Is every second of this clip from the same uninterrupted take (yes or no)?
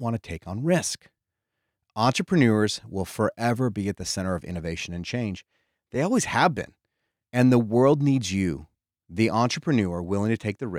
yes